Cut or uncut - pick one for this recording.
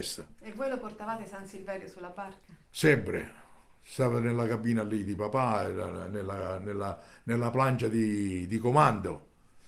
uncut